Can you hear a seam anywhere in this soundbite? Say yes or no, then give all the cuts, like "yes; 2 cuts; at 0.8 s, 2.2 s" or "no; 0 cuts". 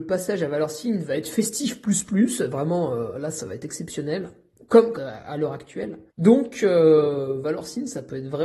yes; 2 cuts; at 4.9 s, 6.1 s